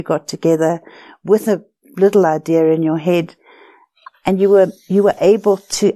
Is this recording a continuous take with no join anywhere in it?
yes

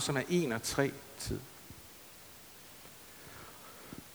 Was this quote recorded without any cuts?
no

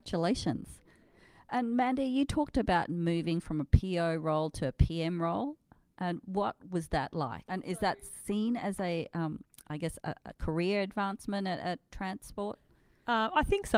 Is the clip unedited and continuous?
yes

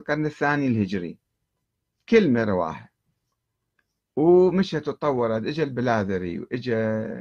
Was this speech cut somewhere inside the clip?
no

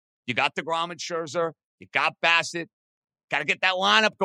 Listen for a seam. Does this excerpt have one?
no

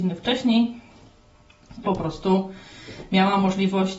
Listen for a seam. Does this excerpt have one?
yes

